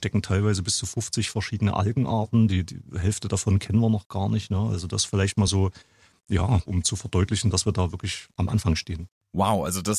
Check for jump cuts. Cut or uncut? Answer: uncut